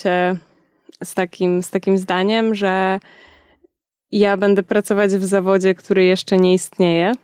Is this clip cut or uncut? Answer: uncut